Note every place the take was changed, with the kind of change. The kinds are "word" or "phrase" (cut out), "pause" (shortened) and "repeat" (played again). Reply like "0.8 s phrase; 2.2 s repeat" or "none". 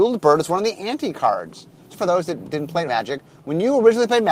1.9 s word; 2.9 s word